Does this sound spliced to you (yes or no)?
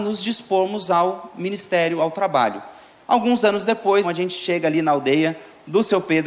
yes